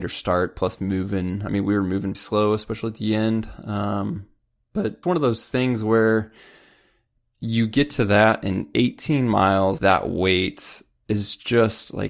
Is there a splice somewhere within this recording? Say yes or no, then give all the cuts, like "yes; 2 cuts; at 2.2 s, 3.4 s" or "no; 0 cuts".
yes; 3 cuts; at 2.1 s, 5.0 s, 9.8 s